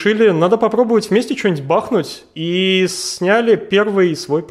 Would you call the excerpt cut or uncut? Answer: uncut